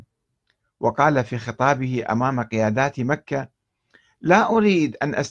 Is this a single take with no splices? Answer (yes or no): yes